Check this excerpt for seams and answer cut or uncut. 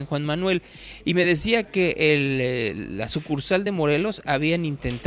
uncut